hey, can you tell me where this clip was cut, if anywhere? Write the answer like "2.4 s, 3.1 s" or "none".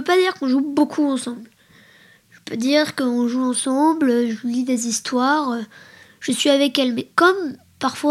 none